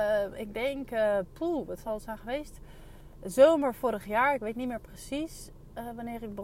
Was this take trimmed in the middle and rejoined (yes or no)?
no